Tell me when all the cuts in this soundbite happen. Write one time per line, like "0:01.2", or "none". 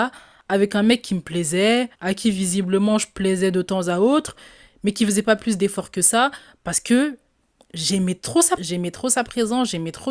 0:01.9
0:08.6